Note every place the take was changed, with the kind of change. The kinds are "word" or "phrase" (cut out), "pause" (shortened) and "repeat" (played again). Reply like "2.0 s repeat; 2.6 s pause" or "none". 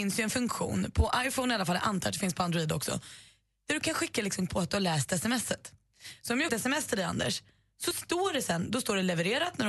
4.5 s word; 6.5 s word